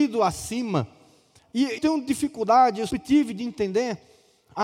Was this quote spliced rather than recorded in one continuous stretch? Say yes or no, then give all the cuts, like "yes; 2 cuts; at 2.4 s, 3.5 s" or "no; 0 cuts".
yes; 2 cuts; at 1.8 s, 2.9 s